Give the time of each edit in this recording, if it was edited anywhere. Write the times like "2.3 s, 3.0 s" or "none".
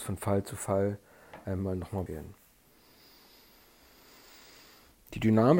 2.1 s